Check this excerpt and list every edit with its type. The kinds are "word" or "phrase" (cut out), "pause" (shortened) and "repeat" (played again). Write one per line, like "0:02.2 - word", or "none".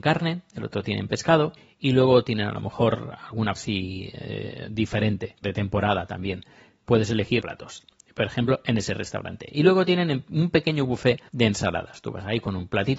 0:01.6 - pause
0:03.5 - word
0:05.4 - word
0:06.9 - word
0:07.4 - phrase
0:11.3 - pause